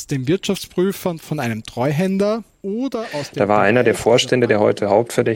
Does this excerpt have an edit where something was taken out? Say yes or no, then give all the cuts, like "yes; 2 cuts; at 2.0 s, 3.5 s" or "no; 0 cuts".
yes; 1 cut; at 2.5 s